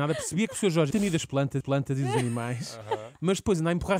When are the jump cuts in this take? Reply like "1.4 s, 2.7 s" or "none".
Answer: 0.9 s, 1.6 s